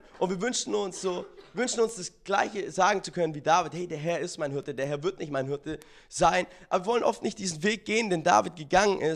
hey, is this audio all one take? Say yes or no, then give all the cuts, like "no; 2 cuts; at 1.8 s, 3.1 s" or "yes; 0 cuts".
yes; 0 cuts